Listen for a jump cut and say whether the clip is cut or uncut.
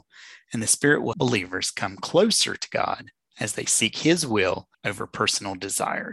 cut